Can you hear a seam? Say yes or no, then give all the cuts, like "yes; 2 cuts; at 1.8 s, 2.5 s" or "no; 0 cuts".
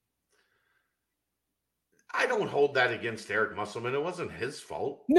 no; 0 cuts